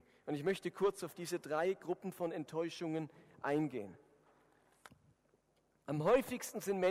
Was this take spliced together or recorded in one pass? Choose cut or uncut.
uncut